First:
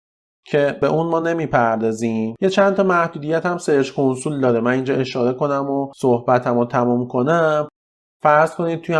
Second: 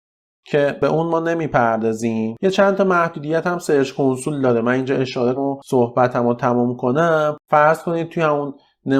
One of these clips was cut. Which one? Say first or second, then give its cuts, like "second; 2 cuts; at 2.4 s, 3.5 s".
second; 2 cuts; at 5.3 s, 7.4 s